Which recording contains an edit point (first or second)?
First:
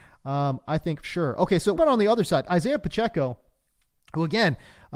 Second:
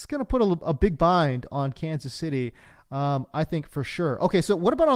first